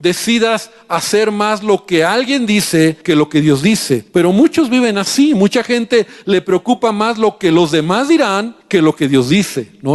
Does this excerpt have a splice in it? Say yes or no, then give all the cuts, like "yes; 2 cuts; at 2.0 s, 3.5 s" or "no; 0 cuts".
yes; 3 cuts; at 3.0 s, 4.1 s, 8.6 s